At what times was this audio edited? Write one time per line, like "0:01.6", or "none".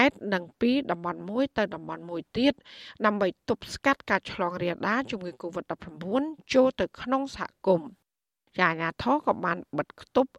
none